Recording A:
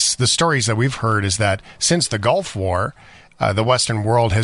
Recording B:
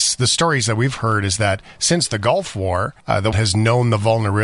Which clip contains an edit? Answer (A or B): B